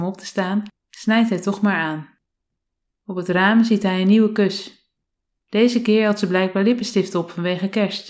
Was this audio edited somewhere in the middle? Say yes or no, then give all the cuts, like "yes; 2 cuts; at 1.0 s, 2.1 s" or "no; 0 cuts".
no; 0 cuts